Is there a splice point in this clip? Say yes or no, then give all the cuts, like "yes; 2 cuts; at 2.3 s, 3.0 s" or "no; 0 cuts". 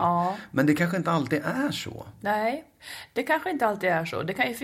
no; 0 cuts